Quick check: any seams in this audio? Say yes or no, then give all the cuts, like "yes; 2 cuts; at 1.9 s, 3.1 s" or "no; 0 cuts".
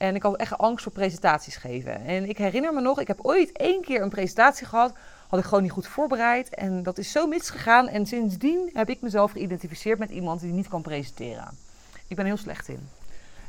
no; 0 cuts